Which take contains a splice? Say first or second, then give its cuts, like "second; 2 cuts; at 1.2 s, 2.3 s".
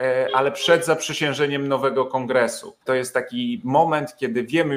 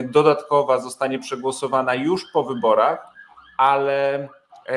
first; 1 cut; at 2.8 s